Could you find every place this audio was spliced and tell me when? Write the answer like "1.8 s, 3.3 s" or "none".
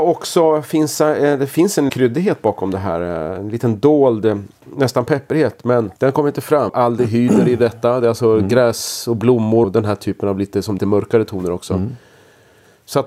1.9 s, 6.0 s, 6.7 s, 9.6 s, 10.8 s